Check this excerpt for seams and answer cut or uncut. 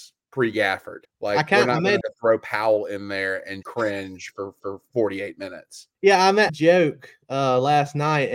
cut